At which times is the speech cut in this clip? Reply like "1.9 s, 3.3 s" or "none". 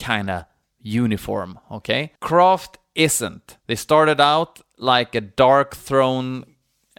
2.2 s, 3.6 s

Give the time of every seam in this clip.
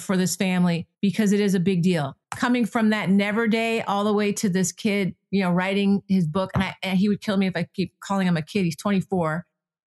0.9 s, 2.2 s

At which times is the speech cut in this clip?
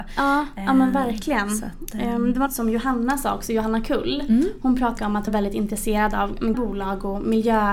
2.5 s, 5.0 s, 5.3 s, 6.5 s

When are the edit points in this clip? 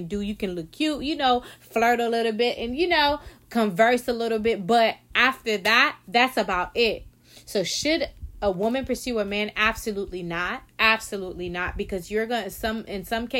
10.7 s

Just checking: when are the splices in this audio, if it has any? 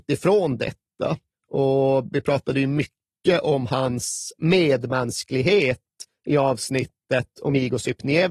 1.3 s

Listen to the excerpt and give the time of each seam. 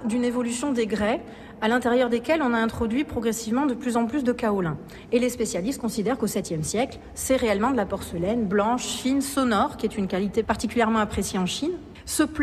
none

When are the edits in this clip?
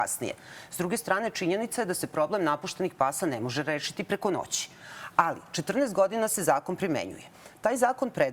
none

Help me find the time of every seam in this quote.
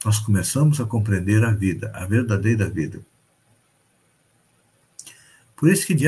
none

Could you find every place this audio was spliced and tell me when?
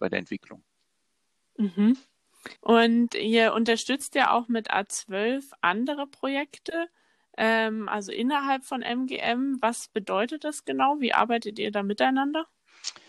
2.6 s

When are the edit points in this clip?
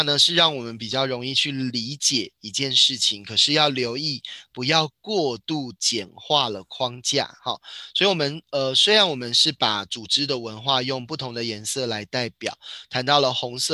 none

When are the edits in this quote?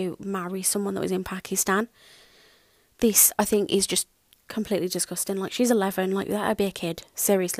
none

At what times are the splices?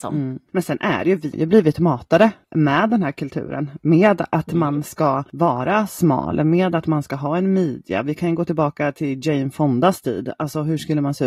1.3 s

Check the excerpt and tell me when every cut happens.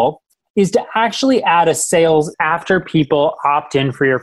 2.3 s

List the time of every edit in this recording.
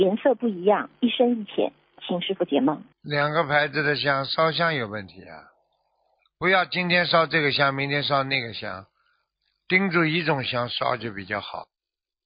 2.9 s

